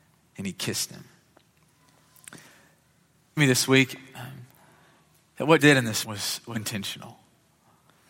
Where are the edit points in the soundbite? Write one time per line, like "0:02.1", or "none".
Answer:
0:03.4
0:05.6
0:06.0
0:06.5